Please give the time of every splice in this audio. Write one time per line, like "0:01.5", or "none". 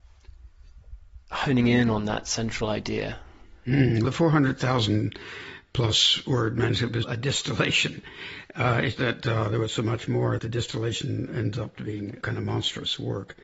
0:04.0
0:07.0
0:09.0
0:10.4
0:12.2